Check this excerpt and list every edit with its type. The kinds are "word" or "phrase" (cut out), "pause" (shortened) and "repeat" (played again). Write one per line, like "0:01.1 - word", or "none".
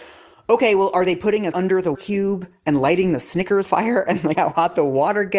0:01.5 - word
0:01.9 - word
0:03.6 - word
0:04.3 - word